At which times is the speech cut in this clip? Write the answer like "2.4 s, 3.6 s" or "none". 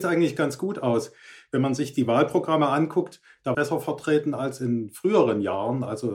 3.5 s

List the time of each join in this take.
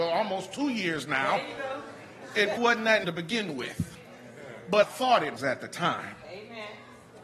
2.6 s, 3.0 s, 4.8 s, 5.4 s

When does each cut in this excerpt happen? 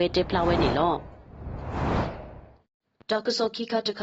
2.8 s

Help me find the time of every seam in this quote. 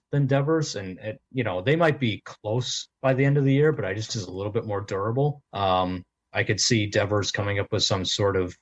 2.9 s, 4.1 s, 5.5 s

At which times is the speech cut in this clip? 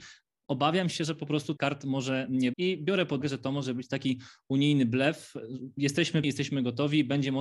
1.6 s, 2.5 s, 3.2 s, 6.2 s

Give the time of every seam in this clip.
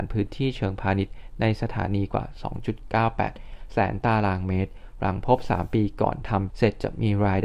6.5 s

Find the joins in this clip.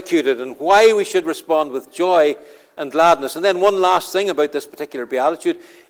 none

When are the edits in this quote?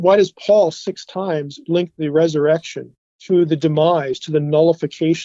3.0 s

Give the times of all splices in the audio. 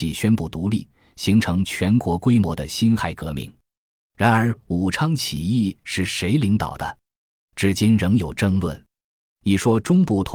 none

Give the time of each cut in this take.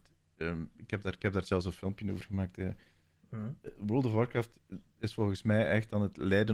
none

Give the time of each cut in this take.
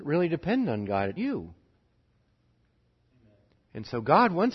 1.2 s

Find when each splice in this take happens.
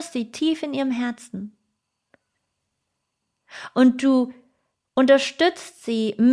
none

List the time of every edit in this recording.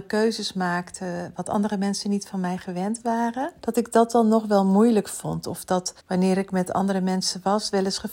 3.6 s, 6.0 s

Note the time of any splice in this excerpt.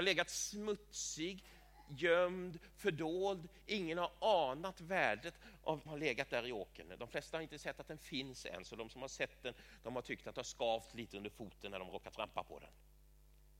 5.9 s

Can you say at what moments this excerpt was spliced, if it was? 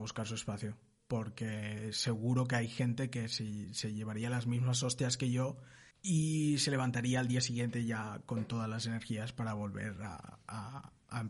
5.9 s

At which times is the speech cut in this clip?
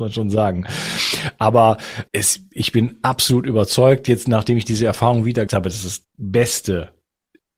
2.1 s, 5.5 s, 6.1 s

